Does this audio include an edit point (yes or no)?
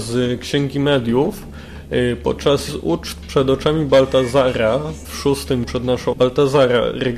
yes